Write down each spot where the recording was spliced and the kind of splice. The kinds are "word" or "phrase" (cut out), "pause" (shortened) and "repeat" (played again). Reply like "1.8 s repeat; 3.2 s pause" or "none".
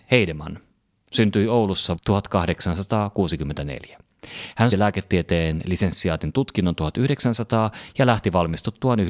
2.0 s word; 4.7 s word